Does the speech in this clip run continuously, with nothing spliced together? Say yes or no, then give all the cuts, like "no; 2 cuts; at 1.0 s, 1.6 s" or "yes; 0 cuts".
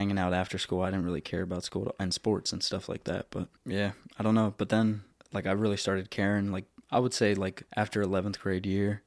no; 3 cuts; at 3.6 s, 5.1 s, 7.7 s